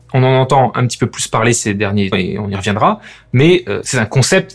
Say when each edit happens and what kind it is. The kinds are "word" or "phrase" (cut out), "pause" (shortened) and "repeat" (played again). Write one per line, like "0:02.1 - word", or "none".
0:02.1 - word